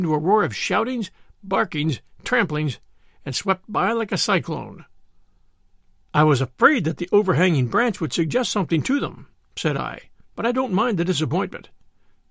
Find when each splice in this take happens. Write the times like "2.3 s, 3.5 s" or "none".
none